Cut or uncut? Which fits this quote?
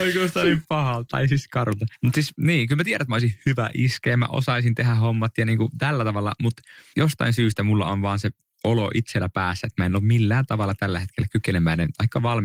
uncut